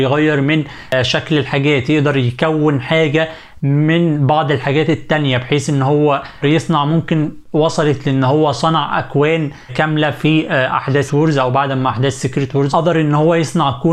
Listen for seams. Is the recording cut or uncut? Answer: cut